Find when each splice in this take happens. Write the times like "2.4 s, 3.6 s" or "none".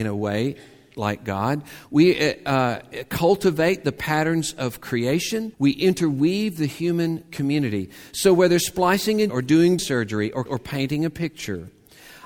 5.5 s, 9.3 s, 9.8 s, 10.5 s